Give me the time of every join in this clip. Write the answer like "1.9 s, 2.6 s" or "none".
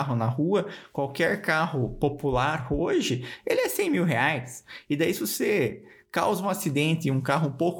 none